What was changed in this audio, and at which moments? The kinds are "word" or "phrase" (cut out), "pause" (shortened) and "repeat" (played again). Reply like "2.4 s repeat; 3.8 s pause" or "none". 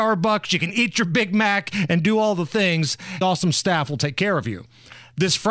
3.2 s phrase